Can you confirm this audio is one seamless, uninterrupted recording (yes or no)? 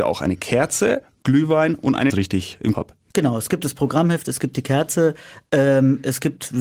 no